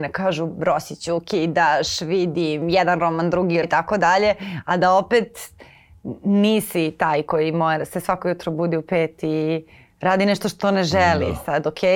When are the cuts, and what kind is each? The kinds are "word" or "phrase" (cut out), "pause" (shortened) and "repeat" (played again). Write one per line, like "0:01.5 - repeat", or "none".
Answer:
0:03.6 - phrase